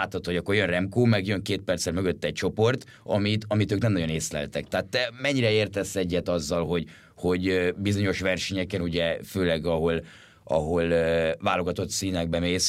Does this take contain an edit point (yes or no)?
no